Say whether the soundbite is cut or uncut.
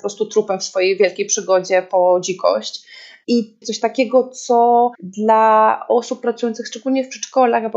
cut